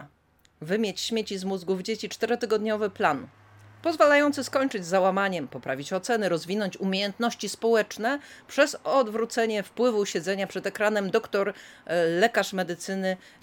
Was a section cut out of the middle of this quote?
no; 0 cuts

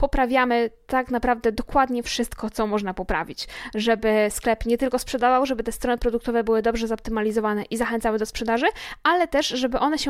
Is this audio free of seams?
yes; 0 cuts

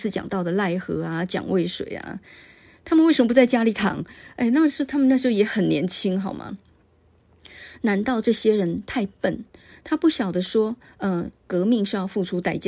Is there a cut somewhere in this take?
no; 0 cuts

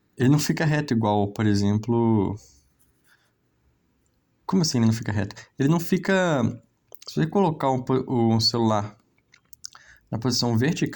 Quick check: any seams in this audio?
no; 0 cuts

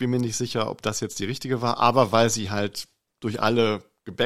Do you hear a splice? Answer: no; 0 cuts

